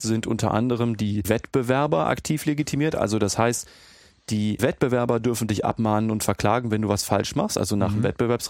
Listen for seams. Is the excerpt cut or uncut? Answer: uncut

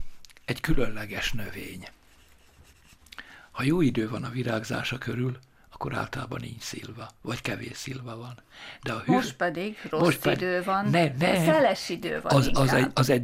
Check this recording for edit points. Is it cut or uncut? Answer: uncut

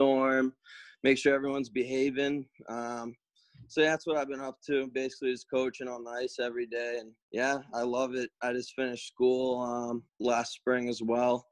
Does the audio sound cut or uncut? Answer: cut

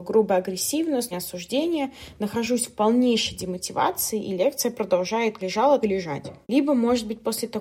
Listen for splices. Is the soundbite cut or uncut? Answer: cut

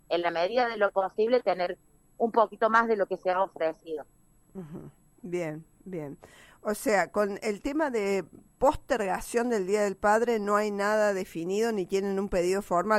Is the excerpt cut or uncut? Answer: uncut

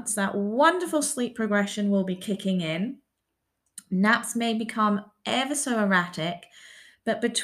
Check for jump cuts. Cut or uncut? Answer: uncut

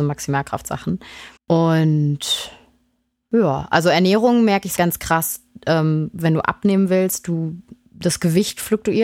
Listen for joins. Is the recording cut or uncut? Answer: cut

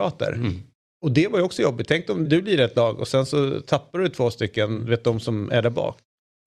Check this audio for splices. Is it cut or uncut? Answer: cut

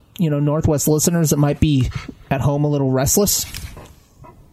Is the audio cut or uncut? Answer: uncut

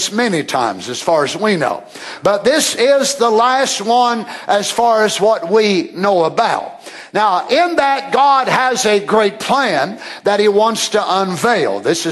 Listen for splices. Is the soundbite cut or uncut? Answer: uncut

